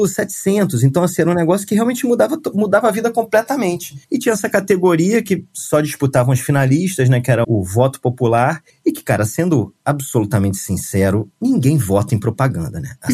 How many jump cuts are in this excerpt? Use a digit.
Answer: 4